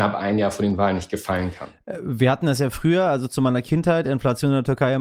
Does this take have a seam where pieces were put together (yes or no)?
no